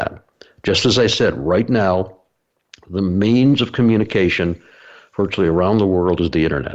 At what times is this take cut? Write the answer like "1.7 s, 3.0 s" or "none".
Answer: none